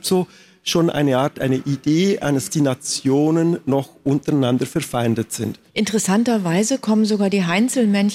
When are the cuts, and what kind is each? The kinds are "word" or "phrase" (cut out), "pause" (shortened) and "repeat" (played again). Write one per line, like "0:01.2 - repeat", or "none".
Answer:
0:02.5 - phrase
0:05.7 - pause